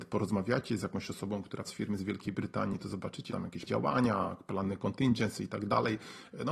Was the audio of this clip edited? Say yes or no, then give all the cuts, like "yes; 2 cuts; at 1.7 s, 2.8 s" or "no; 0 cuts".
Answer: yes; 3 cuts; at 1.7 s, 3.3 s, 3.7 s